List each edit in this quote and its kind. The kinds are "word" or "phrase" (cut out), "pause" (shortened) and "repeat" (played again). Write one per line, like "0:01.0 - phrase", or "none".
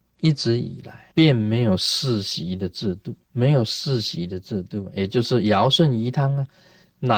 0:01.1 - pause
0:03.2 - pause